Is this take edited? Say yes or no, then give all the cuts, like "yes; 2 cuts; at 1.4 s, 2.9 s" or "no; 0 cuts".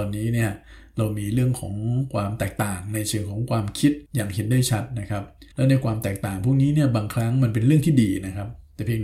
yes; 2 cuts; at 4.1 s, 5.5 s